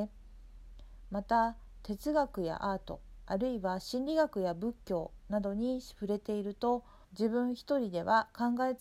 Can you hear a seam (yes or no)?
yes